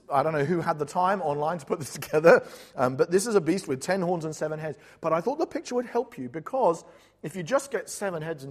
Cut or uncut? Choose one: uncut